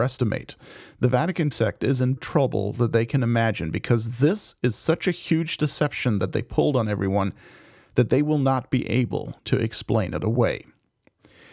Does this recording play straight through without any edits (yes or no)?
no